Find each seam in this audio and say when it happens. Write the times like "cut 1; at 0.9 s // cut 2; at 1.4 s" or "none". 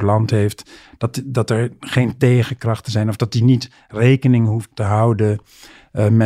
cut 1; at 4.7 s